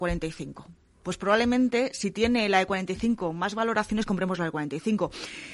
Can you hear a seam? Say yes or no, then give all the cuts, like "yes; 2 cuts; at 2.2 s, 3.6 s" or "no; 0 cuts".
no; 0 cuts